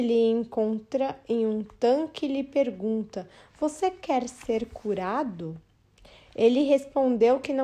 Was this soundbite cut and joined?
no; 0 cuts

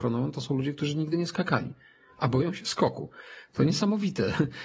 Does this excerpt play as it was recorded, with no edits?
yes; 0 cuts

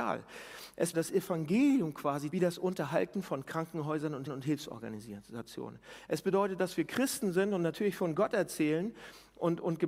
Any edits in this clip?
yes; 3 cuts; at 0.9 s, 2.3 s, 4.3 s

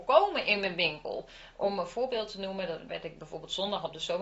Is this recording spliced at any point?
yes; 1 cut; at 2.9 s

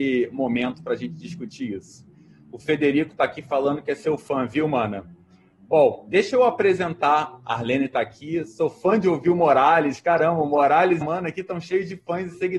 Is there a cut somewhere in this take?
yes; 1 cut; at 11.0 s

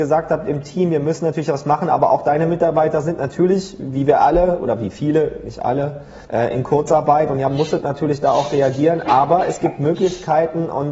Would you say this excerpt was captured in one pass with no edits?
no; 1 cut; at 6.2 s

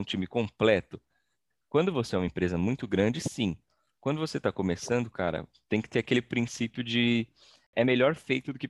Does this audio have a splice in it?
no; 0 cuts

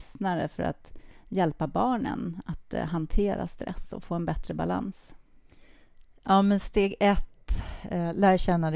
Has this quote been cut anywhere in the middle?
no; 0 cuts

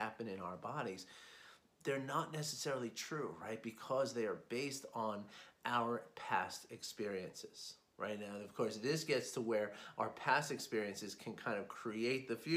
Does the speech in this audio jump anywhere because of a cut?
no; 0 cuts

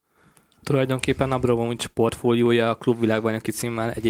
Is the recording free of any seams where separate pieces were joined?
yes; 0 cuts

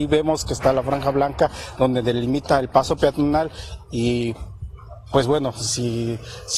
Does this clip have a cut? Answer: no; 0 cuts

